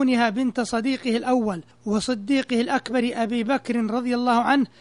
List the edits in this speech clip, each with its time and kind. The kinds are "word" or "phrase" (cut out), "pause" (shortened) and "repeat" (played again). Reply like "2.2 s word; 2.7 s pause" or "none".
none